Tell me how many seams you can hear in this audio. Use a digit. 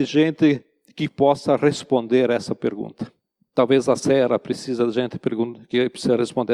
0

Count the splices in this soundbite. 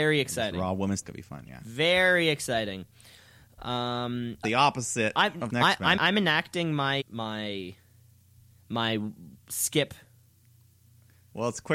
5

